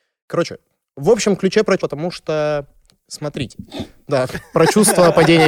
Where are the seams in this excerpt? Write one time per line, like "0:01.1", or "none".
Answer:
0:01.8